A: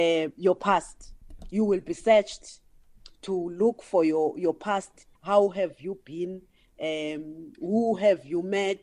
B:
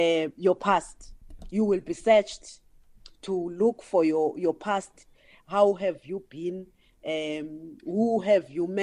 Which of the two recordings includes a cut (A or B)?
A